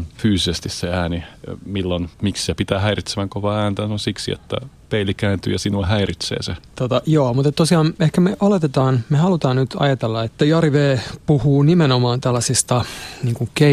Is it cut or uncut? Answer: cut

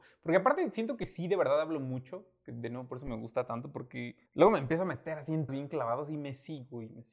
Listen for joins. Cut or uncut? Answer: cut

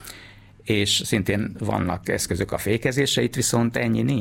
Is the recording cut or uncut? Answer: uncut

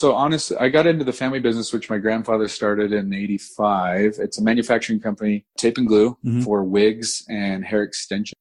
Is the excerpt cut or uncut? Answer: uncut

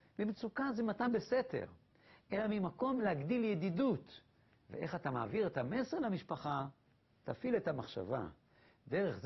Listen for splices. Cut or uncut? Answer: uncut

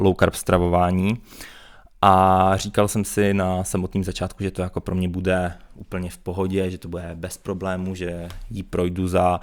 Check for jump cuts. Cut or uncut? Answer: uncut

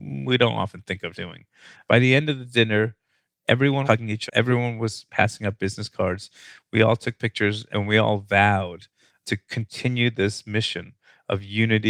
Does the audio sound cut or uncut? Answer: cut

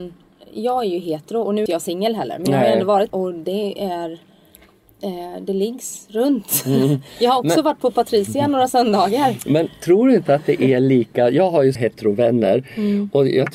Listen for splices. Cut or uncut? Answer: cut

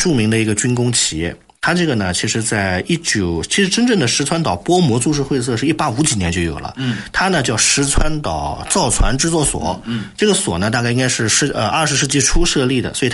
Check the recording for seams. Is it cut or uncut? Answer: uncut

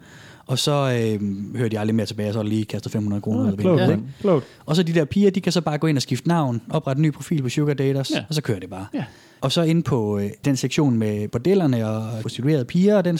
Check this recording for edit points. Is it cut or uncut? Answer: uncut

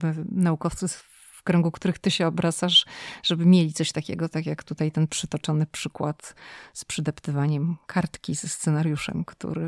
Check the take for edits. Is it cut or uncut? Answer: uncut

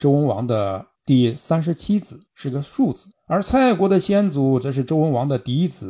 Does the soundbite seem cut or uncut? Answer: cut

